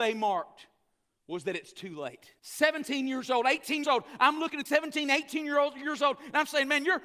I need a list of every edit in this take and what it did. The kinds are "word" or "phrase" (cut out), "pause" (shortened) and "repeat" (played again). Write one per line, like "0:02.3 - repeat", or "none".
0:02.4 - pause
0:03.8 - word
0:04.7 - word